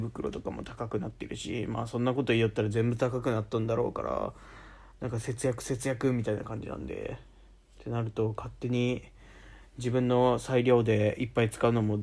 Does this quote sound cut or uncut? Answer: uncut